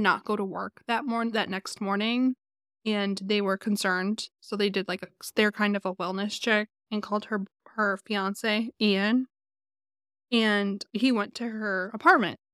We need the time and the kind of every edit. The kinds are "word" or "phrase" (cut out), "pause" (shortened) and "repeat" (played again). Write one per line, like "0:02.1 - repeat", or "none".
none

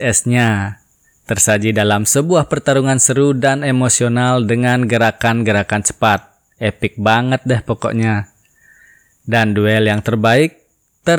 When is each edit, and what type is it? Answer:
none

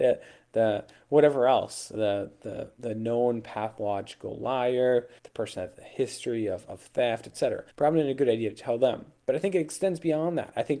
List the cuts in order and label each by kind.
0:05.2 - pause
0:07.7 - pause

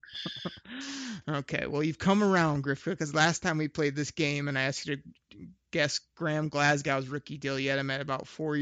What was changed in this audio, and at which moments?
none

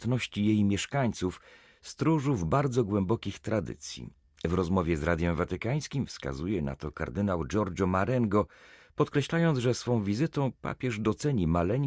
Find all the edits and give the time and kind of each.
none

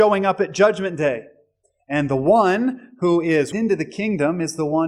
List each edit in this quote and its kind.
0:03.5 - word

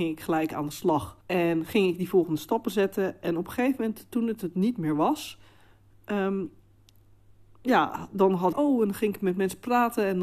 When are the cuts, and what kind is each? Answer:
0:01.2 - pause
0:08.5 - phrase

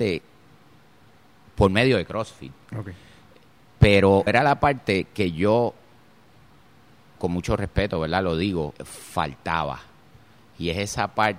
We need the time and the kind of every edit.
0:04.3 - word
0:08.8 - pause

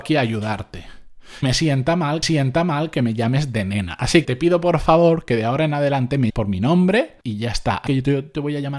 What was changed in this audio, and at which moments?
0:01.4 - word
0:02.2 - repeat
0:04.2 - word
0:06.3 - word
0:07.2 - pause
0:07.9 - word

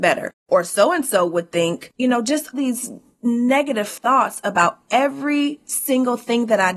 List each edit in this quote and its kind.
0:01.9 - pause
0:02.5 - word

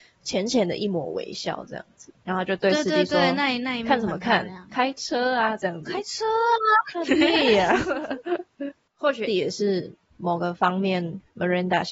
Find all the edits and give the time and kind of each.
0:09.3 - word

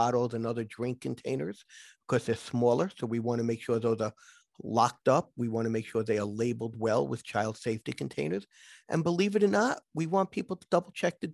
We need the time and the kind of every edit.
none

